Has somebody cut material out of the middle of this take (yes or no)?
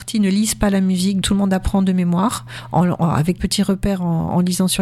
yes